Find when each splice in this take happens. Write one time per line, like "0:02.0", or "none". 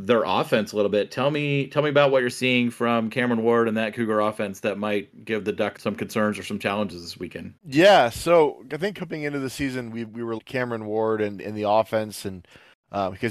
0:05.1
0:05.8
0:07.6
0:10.4